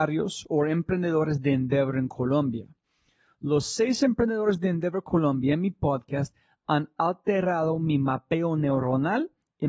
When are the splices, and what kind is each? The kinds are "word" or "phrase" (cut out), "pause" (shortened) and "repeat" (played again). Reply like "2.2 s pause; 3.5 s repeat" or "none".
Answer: none